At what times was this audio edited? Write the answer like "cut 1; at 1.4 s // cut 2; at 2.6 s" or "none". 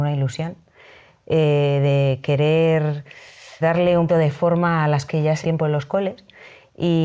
cut 1; at 3.6 s // cut 2; at 4.1 s // cut 3; at 5.1 s // cut 4; at 5.4 s